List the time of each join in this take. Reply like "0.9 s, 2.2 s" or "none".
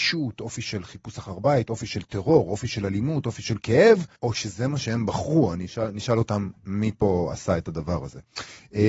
4.1 s, 6.6 s